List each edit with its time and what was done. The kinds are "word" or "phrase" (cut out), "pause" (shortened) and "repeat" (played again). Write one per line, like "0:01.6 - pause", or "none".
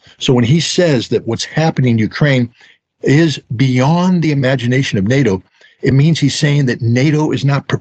none